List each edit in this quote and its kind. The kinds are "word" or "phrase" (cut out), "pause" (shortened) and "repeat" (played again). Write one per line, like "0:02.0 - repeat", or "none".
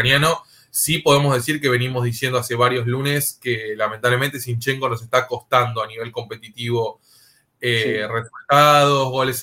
none